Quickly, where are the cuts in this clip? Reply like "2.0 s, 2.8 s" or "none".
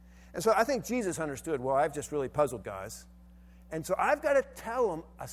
2.6 s

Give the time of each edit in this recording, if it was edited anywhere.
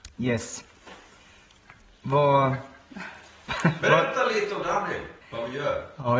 3.8 s, 5.2 s

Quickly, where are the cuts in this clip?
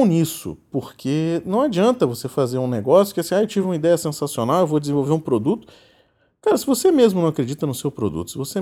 none

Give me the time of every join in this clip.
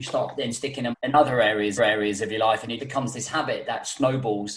0.9 s, 1.8 s, 2.8 s

